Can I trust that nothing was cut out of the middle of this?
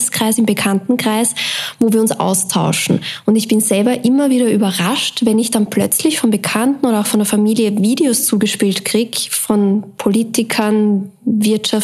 yes; 0 cuts

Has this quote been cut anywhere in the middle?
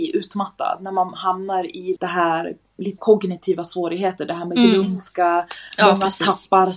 yes; 2 cuts; at 2.0 s, 3.0 s

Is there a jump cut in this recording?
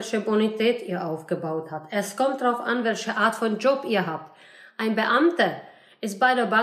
no; 0 cuts

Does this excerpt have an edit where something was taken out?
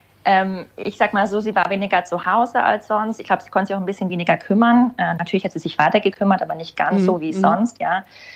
no; 0 cuts

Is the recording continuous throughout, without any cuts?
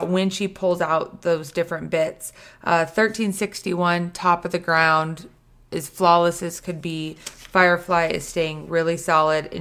yes; 0 cuts

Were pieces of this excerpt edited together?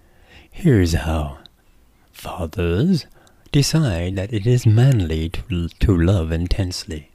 no; 0 cuts

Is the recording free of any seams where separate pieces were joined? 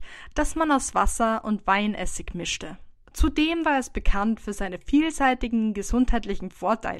no; 1 cut; at 3.0 s

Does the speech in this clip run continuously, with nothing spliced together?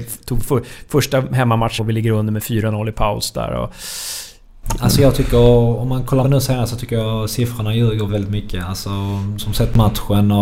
no; 4 cuts; at 1.8 s, 6.2 s, 8.1 s, 9.4 s

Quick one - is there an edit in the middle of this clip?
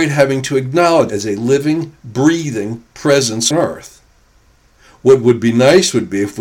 yes; 2 cuts; at 1.1 s, 3.5 s

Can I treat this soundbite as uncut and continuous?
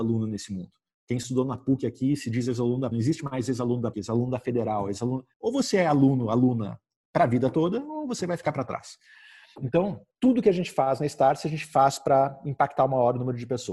no; 4 cuts; at 2.9 s, 3.9 s, 5.3 s, 10.1 s

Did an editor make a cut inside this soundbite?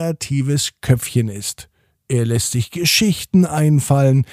no; 0 cuts

